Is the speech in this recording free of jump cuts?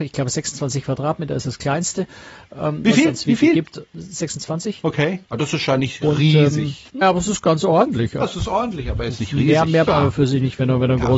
no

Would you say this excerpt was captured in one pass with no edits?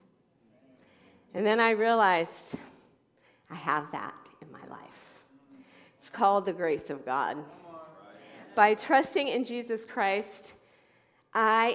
yes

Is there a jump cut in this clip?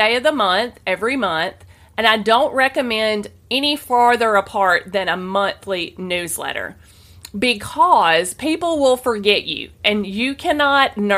no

